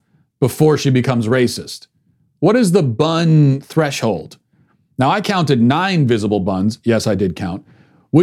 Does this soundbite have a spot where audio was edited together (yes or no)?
no